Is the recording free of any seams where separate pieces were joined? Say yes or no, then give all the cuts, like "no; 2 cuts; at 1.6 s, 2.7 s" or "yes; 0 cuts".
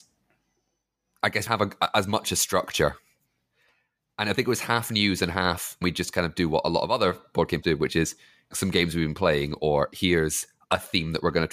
no; 4 cuts; at 1.5 s, 5.8 s, 7.6 s, 8.5 s